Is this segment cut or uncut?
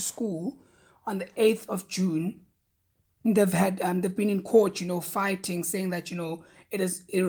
uncut